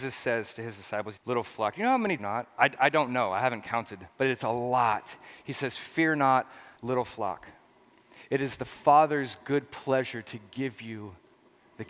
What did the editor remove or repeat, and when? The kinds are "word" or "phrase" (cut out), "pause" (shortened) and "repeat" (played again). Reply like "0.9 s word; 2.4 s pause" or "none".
1.1 s phrase; 2.2 s phrase; 6.7 s pause